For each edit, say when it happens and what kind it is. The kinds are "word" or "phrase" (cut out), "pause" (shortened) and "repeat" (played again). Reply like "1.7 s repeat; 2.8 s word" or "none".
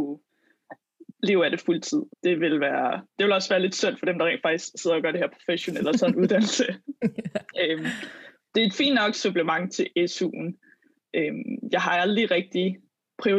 1.1 s pause; 2.1 s pause; 3.1 s pause